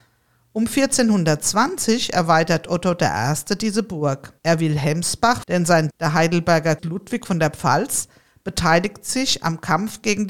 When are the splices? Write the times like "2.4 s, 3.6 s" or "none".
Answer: 4.4 s, 5.4 s, 5.9 s, 6.8 s